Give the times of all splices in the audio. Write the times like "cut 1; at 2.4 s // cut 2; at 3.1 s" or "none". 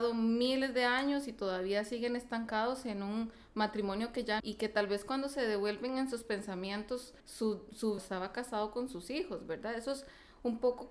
cut 1; at 4.4 s // cut 2; at 7.2 s // cut 3; at 8.0 s